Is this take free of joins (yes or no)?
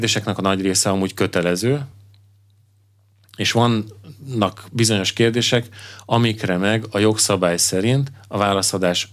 yes